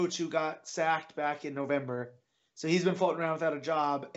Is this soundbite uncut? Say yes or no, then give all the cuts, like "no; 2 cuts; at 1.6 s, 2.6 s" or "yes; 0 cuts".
yes; 0 cuts